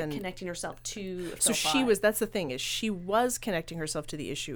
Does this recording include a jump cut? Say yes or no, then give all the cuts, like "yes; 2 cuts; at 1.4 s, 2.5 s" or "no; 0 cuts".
no; 0 cuts